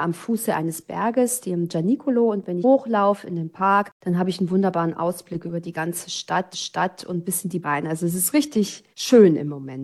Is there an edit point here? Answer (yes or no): yes